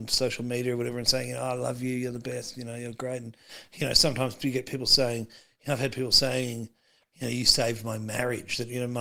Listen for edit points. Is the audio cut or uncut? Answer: uncut